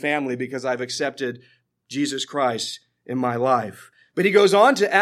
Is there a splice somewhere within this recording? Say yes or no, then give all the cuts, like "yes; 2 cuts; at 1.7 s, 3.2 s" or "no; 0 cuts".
no; 0 cuts